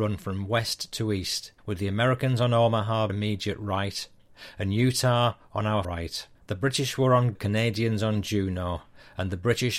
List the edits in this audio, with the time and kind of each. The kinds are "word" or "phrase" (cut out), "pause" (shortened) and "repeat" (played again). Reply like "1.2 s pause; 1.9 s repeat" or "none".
1.6 s pause; 3.1 s phrase; 5.8 s word; 6.4 s pause; 7.3 s phrase

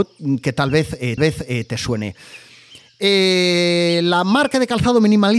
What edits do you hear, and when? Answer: 1.2 s repeat

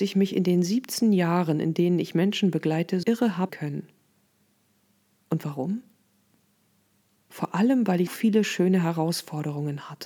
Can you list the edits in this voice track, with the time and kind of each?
3.0 s word; 3.5 s word; 8.1 s word

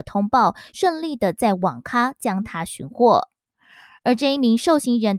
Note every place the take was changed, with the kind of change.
none

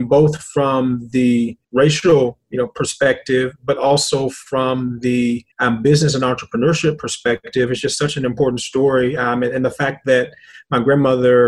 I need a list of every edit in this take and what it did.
1.6 s pause; 5.5 s pause

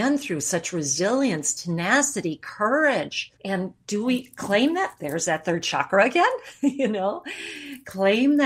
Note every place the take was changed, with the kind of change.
3.4 s pause

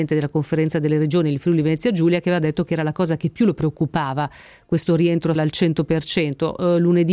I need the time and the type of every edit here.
5.4 s word

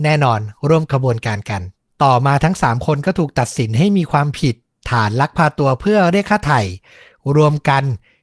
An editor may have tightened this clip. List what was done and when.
1.9 s pause

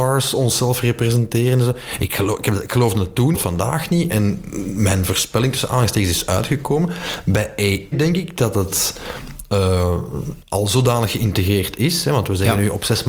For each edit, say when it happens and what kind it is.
3.3 s phrase; 7.9 s word

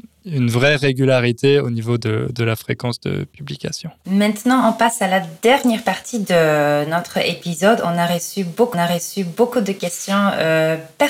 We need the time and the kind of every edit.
4.0 s pause; 8.7 s repeat

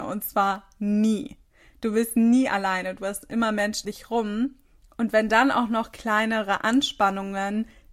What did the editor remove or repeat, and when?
3.8 s word

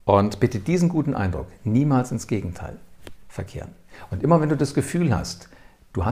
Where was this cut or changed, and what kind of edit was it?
none

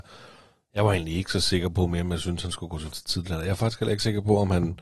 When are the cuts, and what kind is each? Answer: 2.9 s word

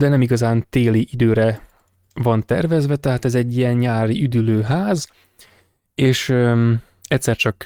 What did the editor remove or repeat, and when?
none

